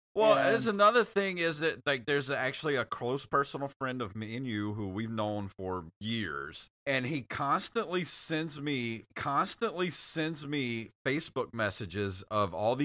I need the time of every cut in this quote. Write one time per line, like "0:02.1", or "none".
0:06.7
0:09.1